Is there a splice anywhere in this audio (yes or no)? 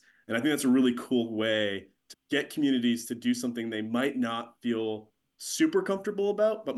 yes